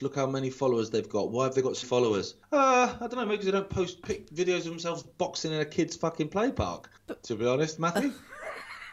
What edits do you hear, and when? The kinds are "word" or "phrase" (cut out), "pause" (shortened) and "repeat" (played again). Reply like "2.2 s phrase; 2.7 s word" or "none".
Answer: 1.8 s word; 2.4 s pause; 7.0 s pause